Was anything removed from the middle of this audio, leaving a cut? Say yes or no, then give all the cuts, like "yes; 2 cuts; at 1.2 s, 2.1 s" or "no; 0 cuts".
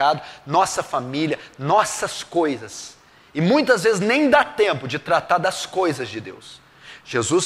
no; 0 cuts